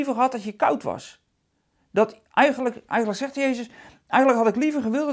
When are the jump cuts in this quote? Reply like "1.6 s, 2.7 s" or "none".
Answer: 2.3 s

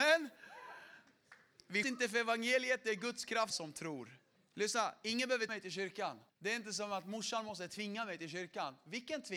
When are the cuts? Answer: 1.8 s, 3.5 s, 4.4 s, 5.5 s, 6.3 s

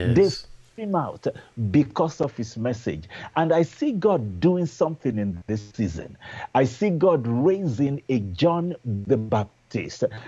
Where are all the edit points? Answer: none

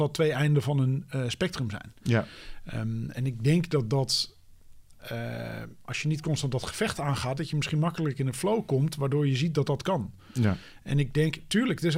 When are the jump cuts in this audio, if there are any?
none

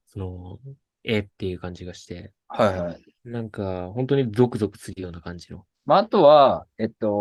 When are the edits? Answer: 1.3 s, 3.2 s, 5.7 s

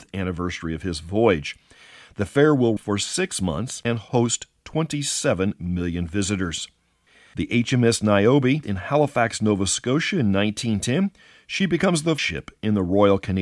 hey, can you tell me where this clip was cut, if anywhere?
2.8 s, 8.6 s, 12.2 s

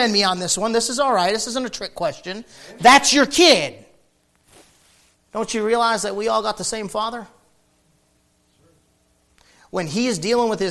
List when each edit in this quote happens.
none

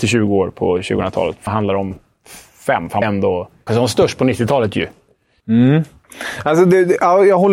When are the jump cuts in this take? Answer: 1.5 s, 3.0 s, 3.7 s

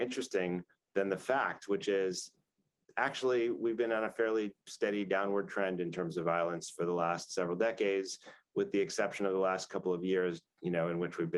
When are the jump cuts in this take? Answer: none

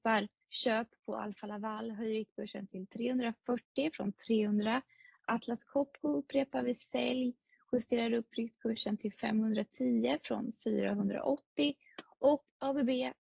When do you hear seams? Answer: none

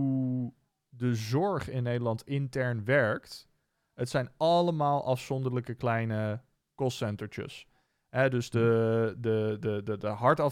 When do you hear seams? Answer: none

